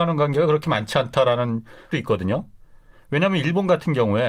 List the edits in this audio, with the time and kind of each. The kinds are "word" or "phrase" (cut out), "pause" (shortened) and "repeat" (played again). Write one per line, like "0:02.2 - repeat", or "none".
0:01.9 - word